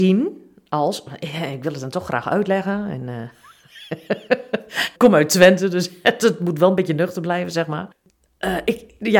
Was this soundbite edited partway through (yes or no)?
yes